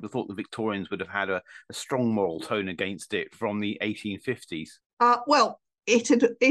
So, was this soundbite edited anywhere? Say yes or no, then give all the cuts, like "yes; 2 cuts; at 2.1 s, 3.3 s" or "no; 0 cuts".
no; 0 cuts